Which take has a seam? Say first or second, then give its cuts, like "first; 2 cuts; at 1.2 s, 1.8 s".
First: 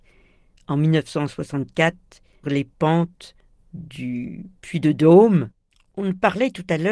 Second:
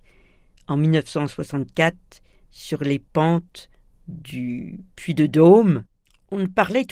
first; 1 cut; at 2.4 s